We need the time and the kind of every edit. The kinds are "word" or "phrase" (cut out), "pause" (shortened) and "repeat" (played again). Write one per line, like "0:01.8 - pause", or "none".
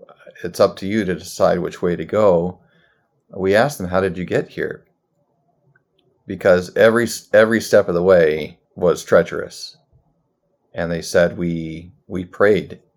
0:08.6 - pause